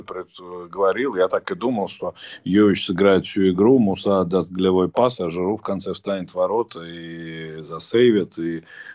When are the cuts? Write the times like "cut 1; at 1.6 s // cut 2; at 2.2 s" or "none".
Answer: none